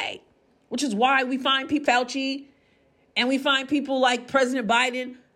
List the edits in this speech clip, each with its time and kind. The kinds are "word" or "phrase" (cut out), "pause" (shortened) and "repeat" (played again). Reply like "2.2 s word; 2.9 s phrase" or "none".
1.9 s word